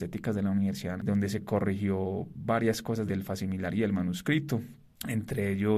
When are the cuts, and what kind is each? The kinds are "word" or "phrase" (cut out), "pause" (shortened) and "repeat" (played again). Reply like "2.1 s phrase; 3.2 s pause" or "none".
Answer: 1.0 s word; 3.1 s word

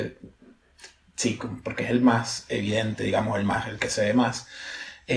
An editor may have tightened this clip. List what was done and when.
none

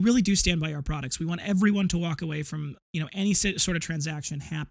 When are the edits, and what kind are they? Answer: none

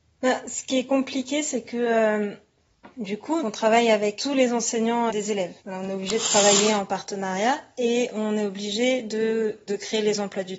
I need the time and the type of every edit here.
2.9 s pause; 3.4 s word; 4.2 s word; 5.1 s word; 5.6 s pause; 9.7 s word

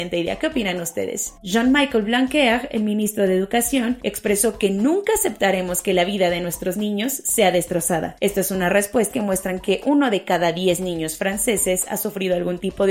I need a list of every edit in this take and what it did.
9.1 s phrase

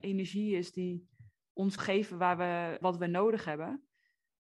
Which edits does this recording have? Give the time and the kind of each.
1.8 s word; 2.8 s word

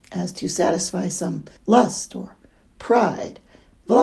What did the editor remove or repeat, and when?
1.6 s pause

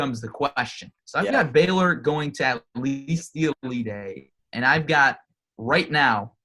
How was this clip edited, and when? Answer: 1.0 s pause; 4.4 s pause

